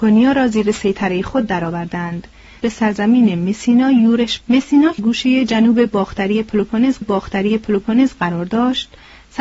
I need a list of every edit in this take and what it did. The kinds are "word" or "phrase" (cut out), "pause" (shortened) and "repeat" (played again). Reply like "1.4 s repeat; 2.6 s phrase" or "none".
2.6 s word; 4.4 s word; 5.0 s word; 7.0 s repeat